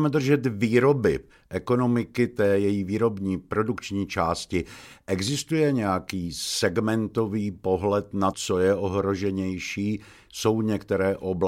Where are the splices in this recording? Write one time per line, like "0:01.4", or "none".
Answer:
0:08.3